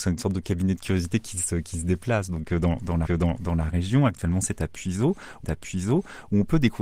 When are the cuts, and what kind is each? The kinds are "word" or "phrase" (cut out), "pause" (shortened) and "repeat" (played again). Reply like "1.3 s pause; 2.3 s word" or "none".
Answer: 3.0 s repeat; 5.4 s repeat